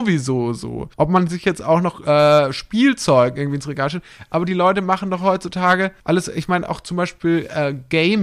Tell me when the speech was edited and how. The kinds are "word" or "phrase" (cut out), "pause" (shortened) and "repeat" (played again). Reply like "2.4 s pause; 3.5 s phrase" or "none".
0.9 s pause; 6.0 s pause